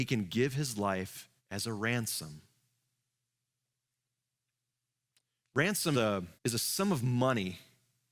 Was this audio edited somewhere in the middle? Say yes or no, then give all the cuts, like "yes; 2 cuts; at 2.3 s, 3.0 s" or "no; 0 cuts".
yes; 3 cuts; at 1.4 s, 5.9 s, 6.4 s